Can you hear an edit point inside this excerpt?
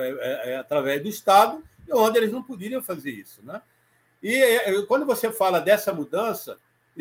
no; 0 cuts

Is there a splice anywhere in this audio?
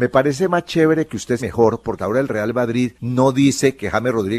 yes; 3 cuts; at 1.4 s, 2.0 s, 2.9 s

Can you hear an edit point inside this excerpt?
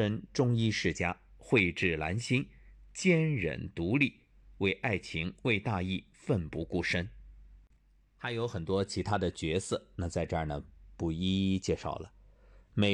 no; 0 cuts

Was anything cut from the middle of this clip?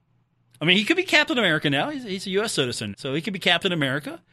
yes; 1 cut; at 2.9 s

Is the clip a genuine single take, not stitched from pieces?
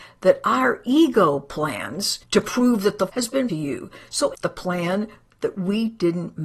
no; 4 cuts; at 2.2 s, 3.1 s, 3.5 s, 4.3 s

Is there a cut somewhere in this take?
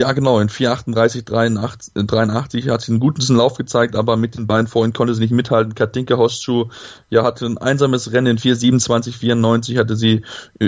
no; 0 cuts

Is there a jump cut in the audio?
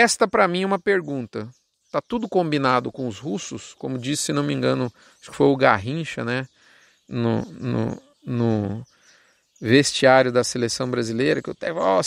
no; 0 cuts

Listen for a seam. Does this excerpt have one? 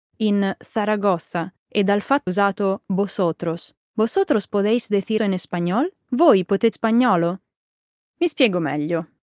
yes; 6 cuts; at 1.6 s, 2.3 s, 3.8 s, 5.2 s, 6.0 s, 6.7 s

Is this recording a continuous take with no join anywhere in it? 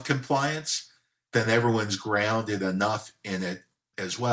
yes; 0 cuts

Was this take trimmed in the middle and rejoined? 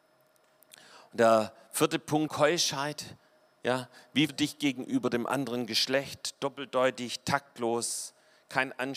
yes; 2 cuts; at 2.3 s, 4.3 s

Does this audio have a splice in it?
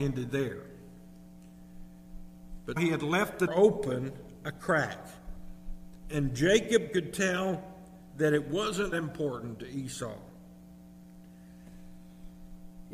yes; 3 cuts; at 2.8 s, 3.5 s, 8.9 s

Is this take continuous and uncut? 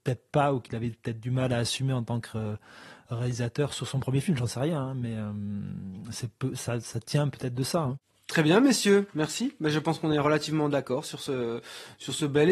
yes; 0 cuts

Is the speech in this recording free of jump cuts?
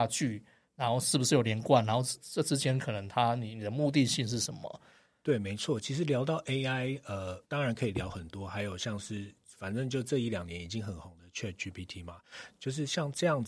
no; 1 cut; at 7.4 s

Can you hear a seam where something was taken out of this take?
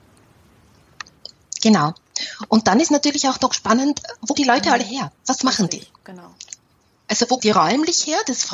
yes; 4 cuts; at 4.3 s, 5.2 s, 6.0 s, 7.4 s

